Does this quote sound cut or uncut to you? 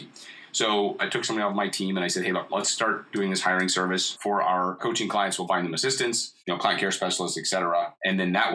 cut